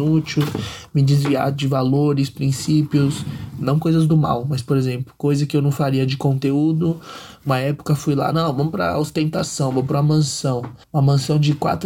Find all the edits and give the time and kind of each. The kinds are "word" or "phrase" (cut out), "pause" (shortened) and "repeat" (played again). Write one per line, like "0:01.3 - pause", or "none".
0:10.8 - pause